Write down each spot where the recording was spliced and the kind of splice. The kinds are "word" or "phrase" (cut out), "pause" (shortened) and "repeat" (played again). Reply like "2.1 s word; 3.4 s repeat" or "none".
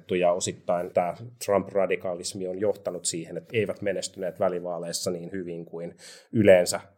0.9 s word; 3.5 s word